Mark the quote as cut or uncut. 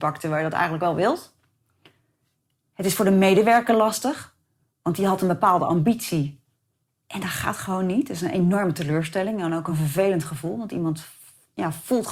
uncut